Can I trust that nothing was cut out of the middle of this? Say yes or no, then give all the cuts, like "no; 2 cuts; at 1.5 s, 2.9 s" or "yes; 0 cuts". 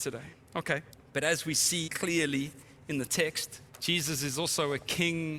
no; 3 cuts; at 0.9 s, 1.9 s, 3.7 s